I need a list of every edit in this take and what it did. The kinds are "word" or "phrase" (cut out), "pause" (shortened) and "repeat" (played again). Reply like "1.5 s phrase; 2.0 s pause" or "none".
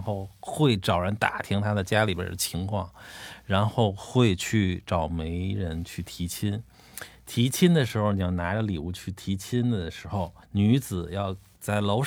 10.4 s pause